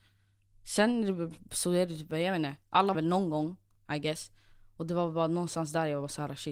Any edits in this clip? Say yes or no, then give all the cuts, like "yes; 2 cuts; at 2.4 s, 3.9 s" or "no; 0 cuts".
yes; 1 cut; at 2.9 s